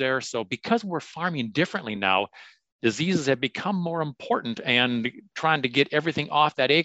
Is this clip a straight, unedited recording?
yes; 0 cuts

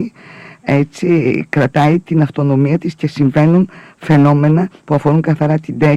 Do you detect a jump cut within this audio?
no; 0 cuts

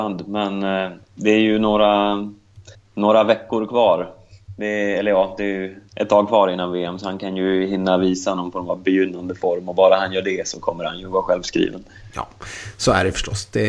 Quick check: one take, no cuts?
no; 3 cuts; at 1.0 s, 2.7 s, 5.9 s

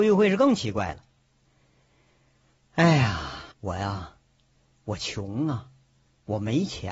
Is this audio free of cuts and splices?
no; 1 cut; at 3.5 s

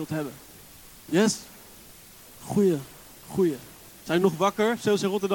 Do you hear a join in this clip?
no; 0 cuts

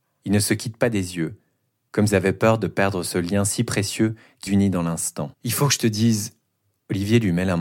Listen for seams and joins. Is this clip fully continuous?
no; 3 cuts; at 2.1 s, 4.5 s, 5.3 s

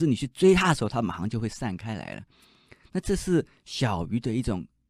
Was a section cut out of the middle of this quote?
no; 0 cuts

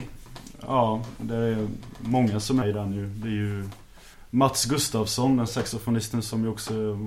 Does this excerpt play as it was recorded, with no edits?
no; 2 cuts; at 2.6 s, 5.5 s

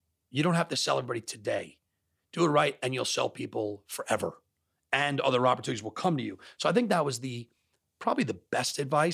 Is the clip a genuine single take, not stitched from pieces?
yes; 0 cuts

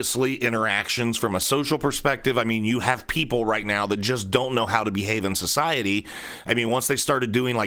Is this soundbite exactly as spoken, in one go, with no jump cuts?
yes; 0 cuts

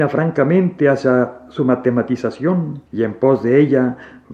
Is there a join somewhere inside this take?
yes; 1 cut; at 2.9 s

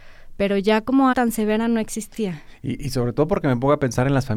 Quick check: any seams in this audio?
yes; 1 cut; at 1.1 s

